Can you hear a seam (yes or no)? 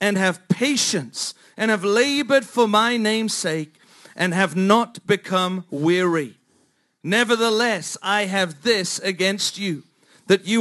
no